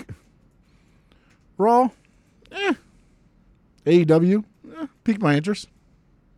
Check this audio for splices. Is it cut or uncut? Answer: cut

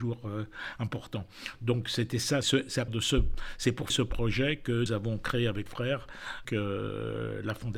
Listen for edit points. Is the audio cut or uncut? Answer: cut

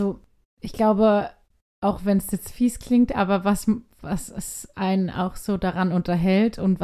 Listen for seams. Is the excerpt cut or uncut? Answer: uncut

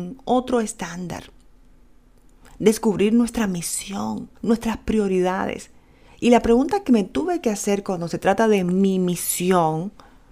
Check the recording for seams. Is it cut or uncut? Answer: cut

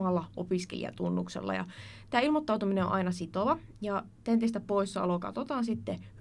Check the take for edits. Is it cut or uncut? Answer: uncut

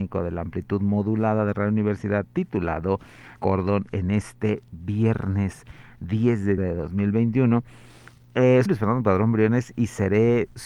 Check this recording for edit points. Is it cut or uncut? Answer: cut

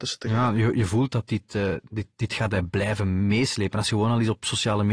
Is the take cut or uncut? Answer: uncut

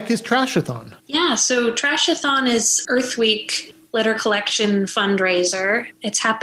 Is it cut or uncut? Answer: cut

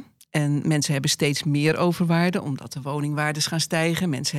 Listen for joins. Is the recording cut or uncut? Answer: uncut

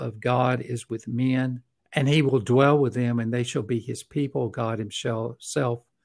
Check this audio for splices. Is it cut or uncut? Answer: cut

